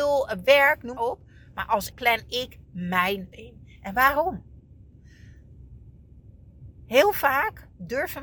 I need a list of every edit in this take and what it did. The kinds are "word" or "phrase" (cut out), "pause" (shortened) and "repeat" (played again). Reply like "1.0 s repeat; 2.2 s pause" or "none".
1.0 s phrase; 1.9 s word; 3.3 s word